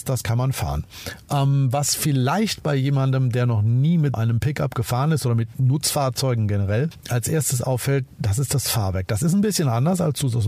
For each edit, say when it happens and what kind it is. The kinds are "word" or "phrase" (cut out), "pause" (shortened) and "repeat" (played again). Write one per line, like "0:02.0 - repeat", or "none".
0:04.1 - word

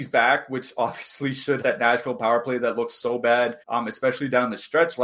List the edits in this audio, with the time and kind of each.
0:01.6 - word
0:03.6 - pause

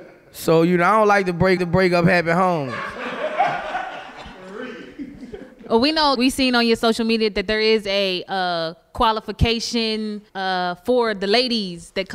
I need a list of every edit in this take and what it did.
0:01.6 - repeat
0:06.1 - word
0:10.3 - pause

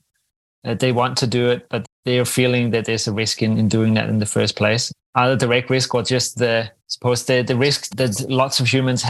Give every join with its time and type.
0:06.8 - pause

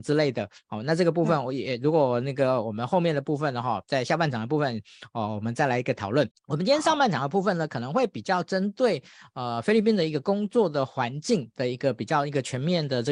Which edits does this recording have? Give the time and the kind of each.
0:06.3 - pause

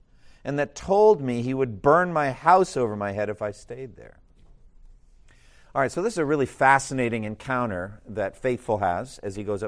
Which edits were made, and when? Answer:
none

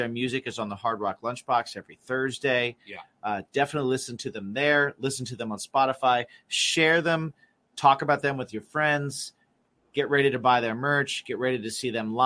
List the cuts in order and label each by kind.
none

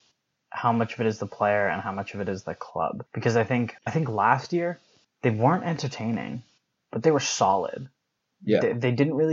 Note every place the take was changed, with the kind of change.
0:03.1 - pause
0:03.8 - pause
0:05.0 - pause

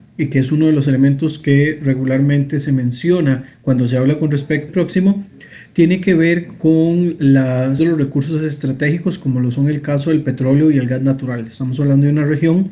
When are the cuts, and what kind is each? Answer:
0:03.5 - pause
0:04.7 - phrase
0:07.8 - word

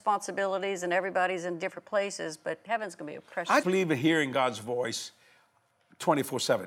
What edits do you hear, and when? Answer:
0:03.6 - word

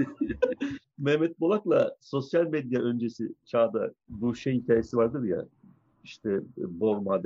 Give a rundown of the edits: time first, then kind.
none

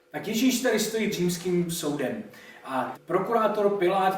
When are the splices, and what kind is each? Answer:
0:01.1 - word
0:02.9 - word

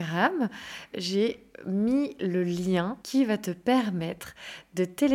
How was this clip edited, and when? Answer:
0:00.9 - word
0:03.0 - pause

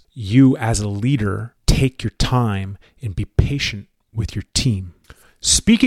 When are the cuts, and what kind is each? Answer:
none

